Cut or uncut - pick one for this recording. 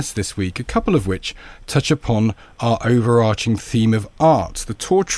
uncut